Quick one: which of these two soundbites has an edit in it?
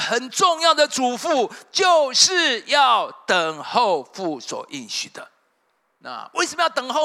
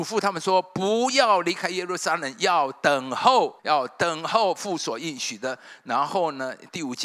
second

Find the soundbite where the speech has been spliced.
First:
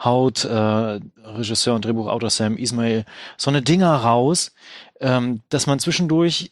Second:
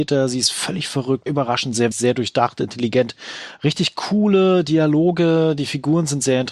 second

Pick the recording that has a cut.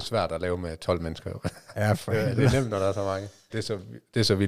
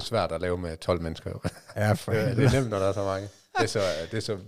first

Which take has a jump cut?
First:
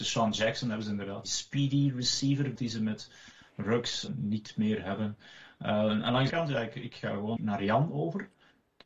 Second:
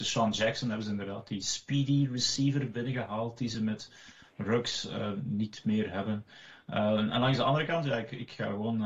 first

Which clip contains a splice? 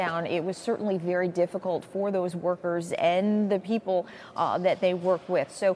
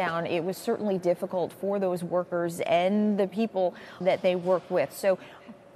second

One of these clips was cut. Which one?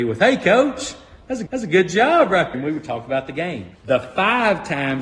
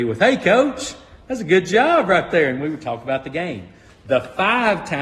first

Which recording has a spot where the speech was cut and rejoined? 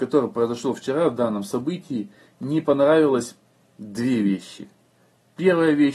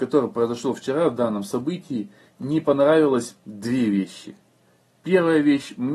second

